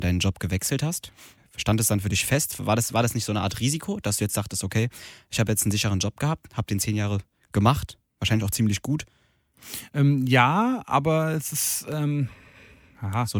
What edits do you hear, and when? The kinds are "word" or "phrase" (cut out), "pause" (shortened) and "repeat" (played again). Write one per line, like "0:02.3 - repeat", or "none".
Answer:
none